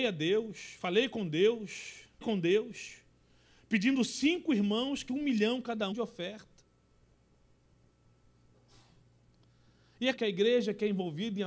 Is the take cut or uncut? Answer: cut